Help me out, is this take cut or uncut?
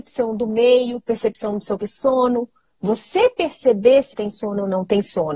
cut